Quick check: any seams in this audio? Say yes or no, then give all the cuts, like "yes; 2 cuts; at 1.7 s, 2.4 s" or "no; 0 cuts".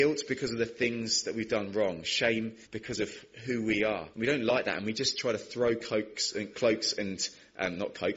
yes; 2 cuts; at 2.6 s, 4.1 s